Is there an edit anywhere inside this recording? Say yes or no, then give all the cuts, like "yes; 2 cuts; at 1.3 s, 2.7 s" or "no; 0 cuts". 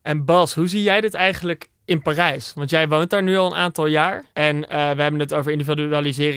yes; 2 cuts; at 1.7 s, 4.3 s